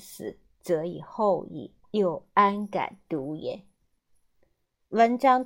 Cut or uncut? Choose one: cut